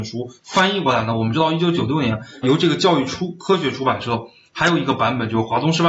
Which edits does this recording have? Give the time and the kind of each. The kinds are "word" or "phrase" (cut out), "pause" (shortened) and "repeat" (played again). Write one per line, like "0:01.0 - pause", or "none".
0:02.4 - word